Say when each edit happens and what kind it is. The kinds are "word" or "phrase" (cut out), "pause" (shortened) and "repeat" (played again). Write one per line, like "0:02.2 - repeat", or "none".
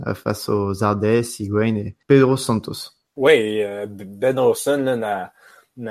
0:02.0 - pause
0:03.1 - pause

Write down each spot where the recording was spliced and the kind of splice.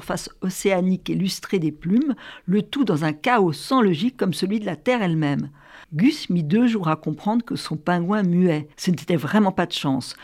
0:05.8 - pause
0:08.7 - pause

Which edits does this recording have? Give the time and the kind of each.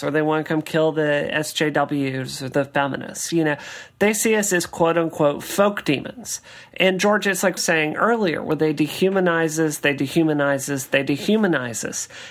0:07.6 - phrase

